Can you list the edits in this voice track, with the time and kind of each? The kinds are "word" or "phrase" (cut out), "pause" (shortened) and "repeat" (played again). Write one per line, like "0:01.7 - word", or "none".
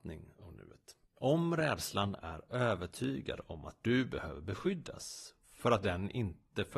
0:01.0 - pause
0:05.4 - pause